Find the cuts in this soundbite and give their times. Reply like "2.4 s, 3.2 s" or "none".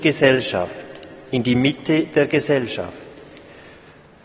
none